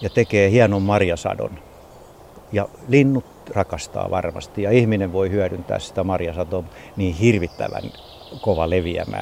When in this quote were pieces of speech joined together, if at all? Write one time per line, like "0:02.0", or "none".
none